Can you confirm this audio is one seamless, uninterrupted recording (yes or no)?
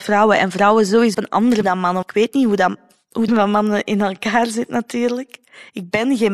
no